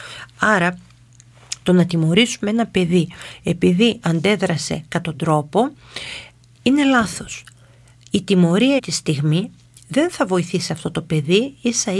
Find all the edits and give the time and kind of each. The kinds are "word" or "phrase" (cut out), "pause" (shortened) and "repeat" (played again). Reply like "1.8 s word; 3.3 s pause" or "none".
4.0 s word; 5.0 s word; 8.8 s word